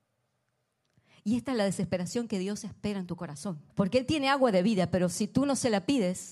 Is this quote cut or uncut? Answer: cut